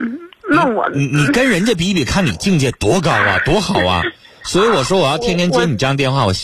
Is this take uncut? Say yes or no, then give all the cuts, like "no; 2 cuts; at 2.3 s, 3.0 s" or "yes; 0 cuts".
yes; 0 cuts